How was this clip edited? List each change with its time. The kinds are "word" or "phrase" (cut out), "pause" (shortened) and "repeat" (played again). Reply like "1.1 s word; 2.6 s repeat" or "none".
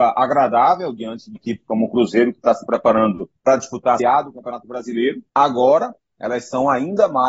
1.4 s word; 3.4 s pause; 4.0 s word; 5.3 s pause